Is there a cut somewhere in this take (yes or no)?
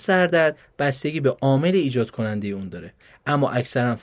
no